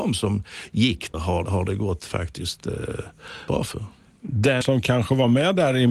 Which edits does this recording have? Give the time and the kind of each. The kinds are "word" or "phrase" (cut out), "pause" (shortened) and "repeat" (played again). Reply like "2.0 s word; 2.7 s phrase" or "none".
1.1 s word; 1.4 s word; 3.5 s word; 4.6 s word

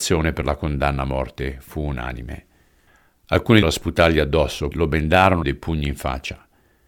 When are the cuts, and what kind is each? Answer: 3.6 s phrase; 4.7 s word; 5.4 s phrase

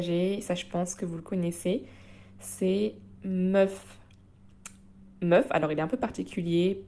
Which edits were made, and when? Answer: none

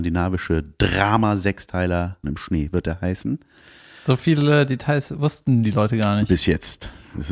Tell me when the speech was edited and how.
2.2 s phrase

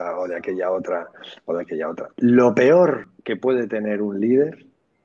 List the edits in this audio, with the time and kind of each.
2.1 s pause; 3.2 s pause

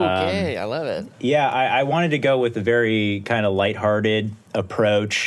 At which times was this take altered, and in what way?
1.1 s pause

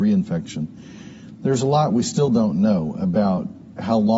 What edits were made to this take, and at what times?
none

